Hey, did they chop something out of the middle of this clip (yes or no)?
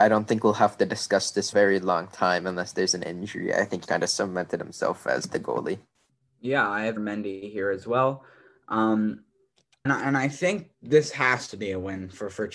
yes